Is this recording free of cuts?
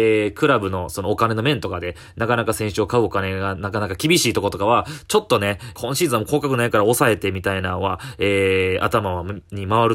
no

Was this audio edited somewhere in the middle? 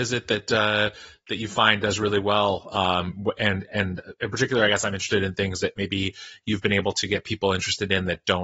no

